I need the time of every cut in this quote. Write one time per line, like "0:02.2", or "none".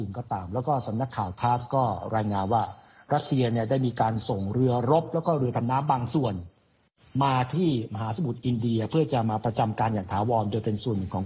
none